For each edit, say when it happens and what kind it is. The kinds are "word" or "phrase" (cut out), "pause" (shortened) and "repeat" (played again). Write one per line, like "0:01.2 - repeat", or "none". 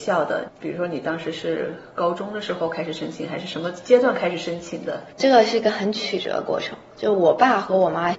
0:05.1 - pause